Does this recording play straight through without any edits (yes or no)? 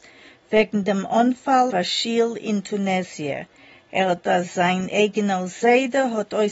no